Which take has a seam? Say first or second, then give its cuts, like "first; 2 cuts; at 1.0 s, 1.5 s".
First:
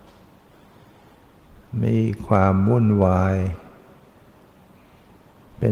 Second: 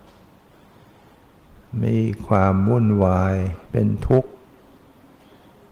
second; 1 cut; at 3.6 s